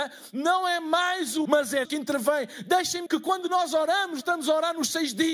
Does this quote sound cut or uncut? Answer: cut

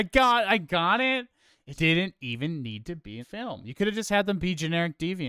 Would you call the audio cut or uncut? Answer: cut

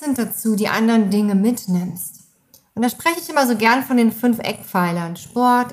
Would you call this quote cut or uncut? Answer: uncut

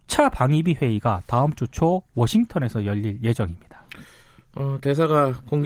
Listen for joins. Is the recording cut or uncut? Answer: uncut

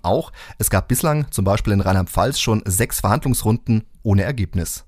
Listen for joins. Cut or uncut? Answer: uncut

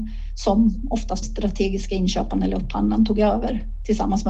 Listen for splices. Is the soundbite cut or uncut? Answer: cut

